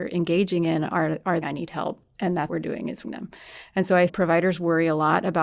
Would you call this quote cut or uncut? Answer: cut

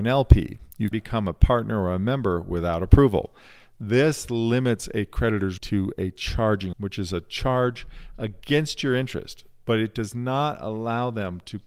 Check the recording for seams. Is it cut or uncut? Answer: cut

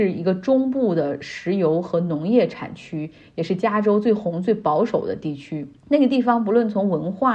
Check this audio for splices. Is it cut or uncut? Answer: cut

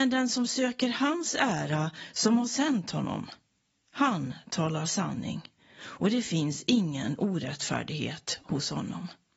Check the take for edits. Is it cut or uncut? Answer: uncut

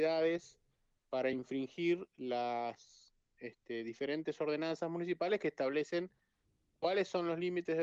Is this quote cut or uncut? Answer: uncut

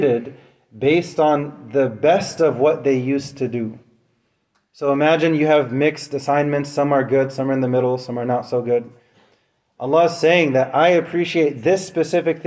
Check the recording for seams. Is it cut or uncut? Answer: uncut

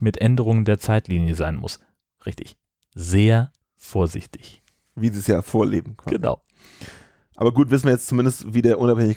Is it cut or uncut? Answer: uncut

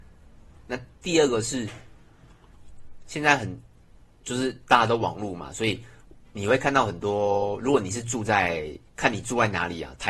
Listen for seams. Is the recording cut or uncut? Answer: cut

